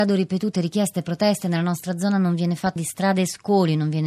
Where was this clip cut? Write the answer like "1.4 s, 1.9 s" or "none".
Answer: 2.8 s